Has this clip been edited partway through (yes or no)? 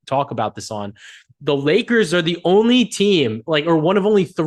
no